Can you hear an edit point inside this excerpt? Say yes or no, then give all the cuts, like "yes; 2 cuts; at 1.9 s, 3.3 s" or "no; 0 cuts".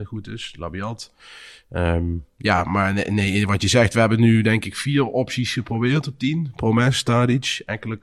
no; 0 cuts